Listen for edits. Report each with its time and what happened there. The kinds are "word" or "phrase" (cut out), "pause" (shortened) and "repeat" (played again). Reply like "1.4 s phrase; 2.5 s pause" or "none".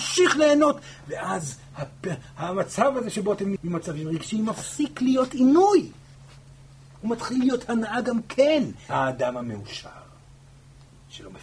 3.6 s word; 8.9 s word

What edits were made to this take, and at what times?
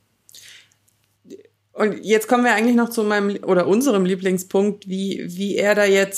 none

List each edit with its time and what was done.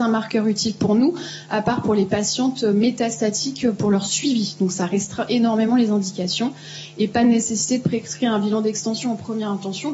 none

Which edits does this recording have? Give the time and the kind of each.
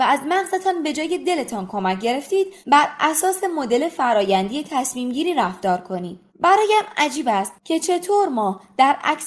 2.6 s pause; 6.3 s pause

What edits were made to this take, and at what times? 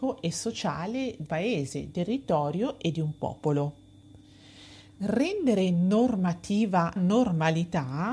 1.3 s word; 1.9 s word; 7.0 s word

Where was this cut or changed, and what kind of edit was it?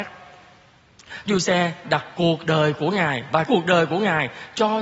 1.3 s word; 1.8 s word; 2.2 s word; 3.5 s word

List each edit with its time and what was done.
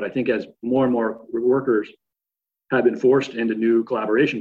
none

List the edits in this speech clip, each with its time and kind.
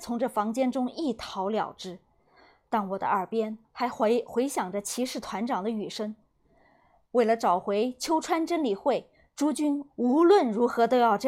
none

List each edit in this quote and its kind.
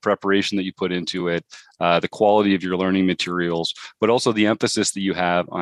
none

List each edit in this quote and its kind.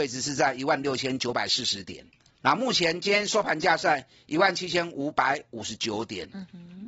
2.2 s pause

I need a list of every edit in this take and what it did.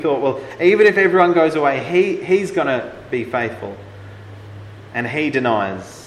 none

